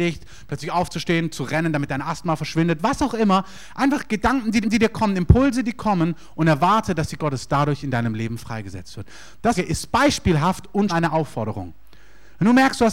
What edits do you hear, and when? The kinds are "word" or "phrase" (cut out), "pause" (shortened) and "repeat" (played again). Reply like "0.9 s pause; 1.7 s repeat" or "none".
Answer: 4.6 s repeat; 7.2 s word; 9.5 s phrase; 10.9 s word